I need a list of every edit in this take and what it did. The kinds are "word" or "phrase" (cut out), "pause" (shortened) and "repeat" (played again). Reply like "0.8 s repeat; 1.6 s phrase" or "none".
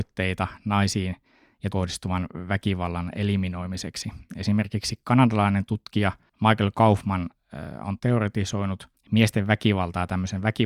1.7 s word; 8.0 s word